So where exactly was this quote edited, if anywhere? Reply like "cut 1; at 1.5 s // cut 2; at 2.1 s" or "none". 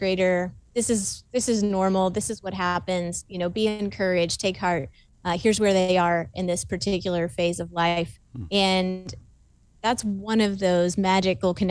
none